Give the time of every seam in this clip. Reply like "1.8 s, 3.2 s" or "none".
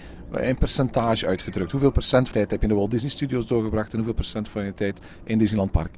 2.3 s